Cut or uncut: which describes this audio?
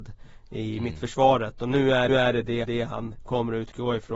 cut